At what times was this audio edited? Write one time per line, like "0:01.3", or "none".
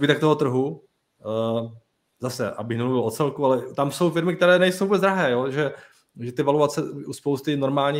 none